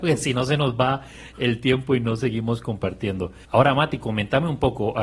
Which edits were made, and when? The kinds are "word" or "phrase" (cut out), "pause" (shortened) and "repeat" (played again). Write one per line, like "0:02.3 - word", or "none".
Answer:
0:03.4 - pause